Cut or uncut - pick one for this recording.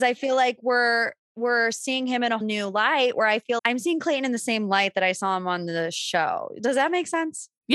cut